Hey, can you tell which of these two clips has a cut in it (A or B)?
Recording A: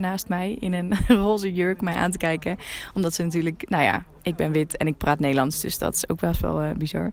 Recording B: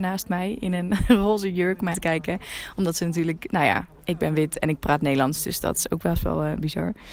B